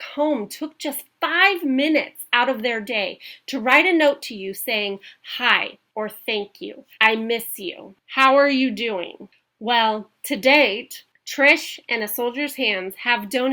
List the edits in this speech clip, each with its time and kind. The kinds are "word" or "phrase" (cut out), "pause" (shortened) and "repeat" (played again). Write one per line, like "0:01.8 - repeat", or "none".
0:05.9 - pause
0:06.9 - pause